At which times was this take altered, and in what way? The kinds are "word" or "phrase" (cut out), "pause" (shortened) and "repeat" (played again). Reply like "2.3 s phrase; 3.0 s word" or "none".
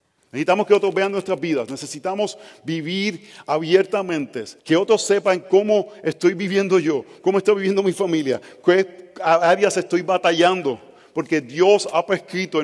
4.6 s pause